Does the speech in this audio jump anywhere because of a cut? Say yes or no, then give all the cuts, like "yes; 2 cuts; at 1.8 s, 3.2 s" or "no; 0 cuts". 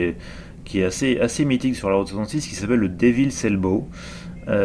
no; 0 cuts